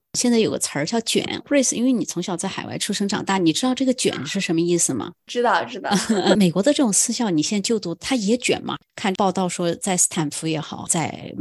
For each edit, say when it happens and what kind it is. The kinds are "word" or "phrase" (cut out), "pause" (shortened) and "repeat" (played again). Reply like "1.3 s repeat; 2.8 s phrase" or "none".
none